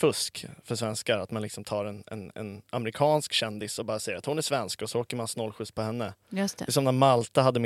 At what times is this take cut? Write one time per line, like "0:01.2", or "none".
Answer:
none